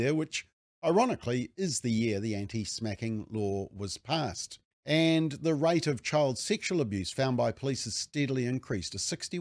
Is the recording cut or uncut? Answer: cut